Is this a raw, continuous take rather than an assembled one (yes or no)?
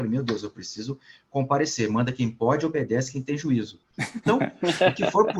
yes